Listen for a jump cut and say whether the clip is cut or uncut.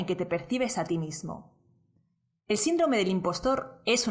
uncut